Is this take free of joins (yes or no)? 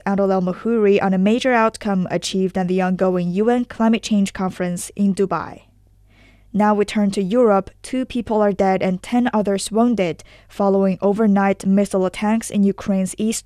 yes